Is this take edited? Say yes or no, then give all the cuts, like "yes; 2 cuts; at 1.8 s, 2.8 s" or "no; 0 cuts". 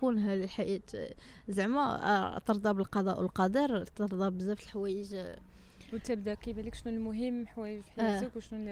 no; 0 cuts